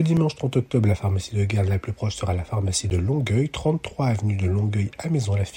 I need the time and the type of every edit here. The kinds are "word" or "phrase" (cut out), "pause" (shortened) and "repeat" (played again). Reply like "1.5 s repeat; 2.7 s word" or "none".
none